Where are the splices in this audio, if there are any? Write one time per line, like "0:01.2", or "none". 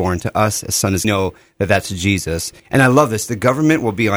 0:01.0
0:02.6